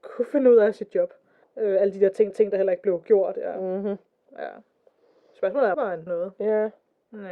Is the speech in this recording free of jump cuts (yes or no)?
no